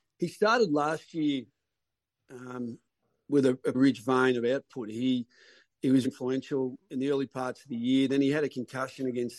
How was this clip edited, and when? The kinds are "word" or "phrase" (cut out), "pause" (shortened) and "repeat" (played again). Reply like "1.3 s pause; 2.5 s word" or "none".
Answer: 3.7 s word; 6.0 s word